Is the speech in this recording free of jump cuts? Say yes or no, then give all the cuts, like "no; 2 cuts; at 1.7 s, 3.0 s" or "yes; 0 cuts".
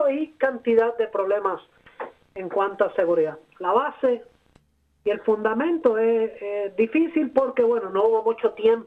yes; 0 cuts